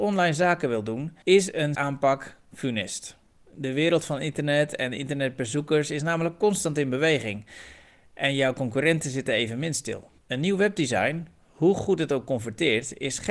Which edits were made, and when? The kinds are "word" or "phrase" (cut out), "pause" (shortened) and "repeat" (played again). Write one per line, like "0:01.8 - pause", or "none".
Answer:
0:01.2 - pause
0:01.7 - word
0:10.2 - pause